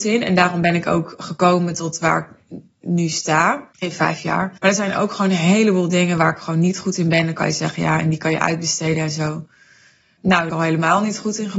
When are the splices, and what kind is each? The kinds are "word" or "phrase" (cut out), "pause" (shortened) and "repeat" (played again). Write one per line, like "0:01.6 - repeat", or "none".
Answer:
0:03.7 - pause
0:04.6 - pause
0:10.5 - phrase